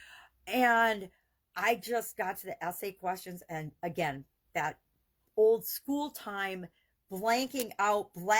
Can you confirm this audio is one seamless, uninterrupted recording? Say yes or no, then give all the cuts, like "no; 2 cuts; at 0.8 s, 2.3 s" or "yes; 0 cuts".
yes; 0 cuts